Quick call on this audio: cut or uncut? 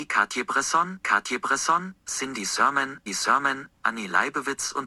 cut